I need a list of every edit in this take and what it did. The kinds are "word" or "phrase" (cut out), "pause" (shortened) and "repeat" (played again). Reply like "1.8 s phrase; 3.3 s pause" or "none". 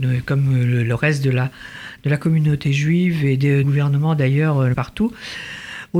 3.6 s phrase; 4.7 s word